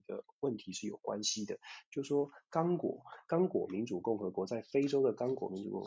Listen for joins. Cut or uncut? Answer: uncut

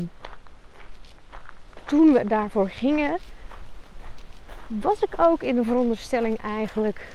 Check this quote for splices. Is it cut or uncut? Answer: uncut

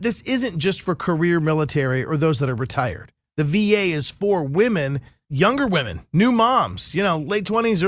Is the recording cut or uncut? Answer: uncut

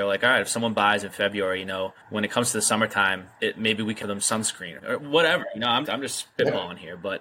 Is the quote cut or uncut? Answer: cut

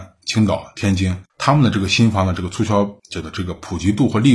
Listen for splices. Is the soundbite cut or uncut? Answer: cut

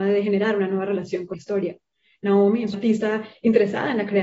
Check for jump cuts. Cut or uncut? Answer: cut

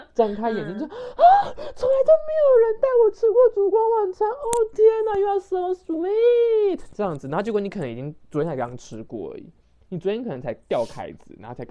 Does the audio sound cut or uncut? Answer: uncut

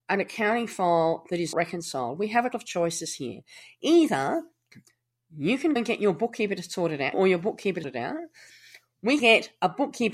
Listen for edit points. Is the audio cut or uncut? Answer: cut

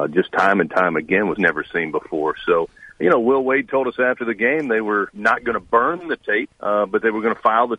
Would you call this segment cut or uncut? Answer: cut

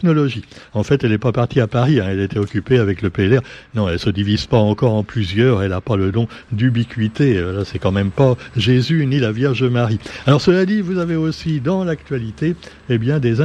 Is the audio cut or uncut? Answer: uncut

